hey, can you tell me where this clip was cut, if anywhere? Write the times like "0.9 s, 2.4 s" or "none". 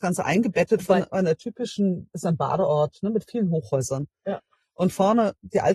none